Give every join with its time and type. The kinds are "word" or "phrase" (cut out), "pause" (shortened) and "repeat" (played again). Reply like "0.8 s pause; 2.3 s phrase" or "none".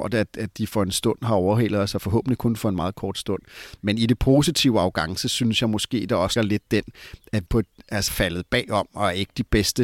6.4 s word; 7.5 s word; 8.1 s word